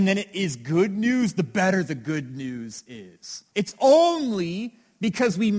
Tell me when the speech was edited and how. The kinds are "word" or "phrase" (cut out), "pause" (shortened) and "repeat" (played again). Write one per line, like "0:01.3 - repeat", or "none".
0:03.5 - pause